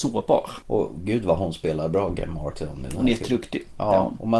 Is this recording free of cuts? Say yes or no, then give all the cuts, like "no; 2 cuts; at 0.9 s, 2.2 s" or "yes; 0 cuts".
yes; 0 cuts